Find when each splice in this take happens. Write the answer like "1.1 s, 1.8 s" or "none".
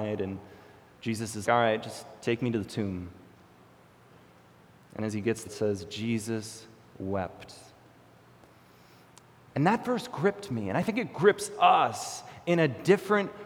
1.4 s, 5.5 s